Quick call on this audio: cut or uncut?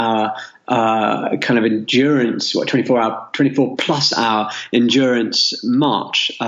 uncut